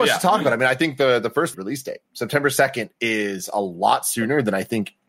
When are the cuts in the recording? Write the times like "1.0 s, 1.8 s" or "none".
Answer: 1.5 s